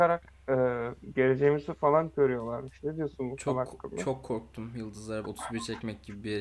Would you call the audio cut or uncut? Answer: cut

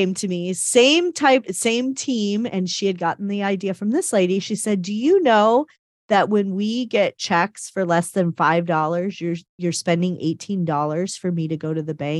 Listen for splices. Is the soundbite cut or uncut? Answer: uncut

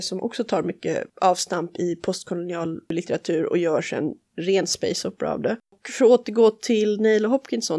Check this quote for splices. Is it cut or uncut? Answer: uncut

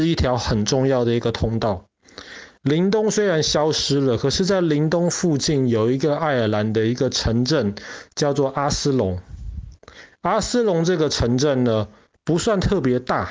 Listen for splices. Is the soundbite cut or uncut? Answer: uncut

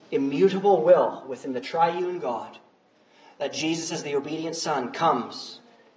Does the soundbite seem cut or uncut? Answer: uncut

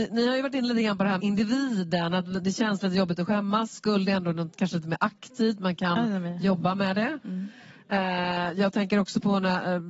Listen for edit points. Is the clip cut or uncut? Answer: cut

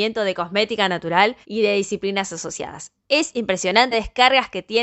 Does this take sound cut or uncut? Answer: cut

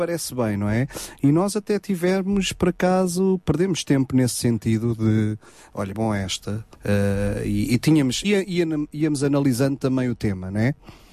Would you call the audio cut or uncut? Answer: cut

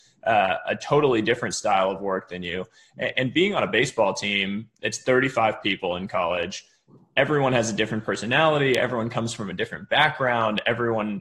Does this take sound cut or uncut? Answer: uncut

